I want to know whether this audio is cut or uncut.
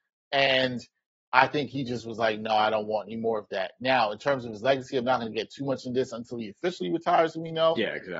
uncut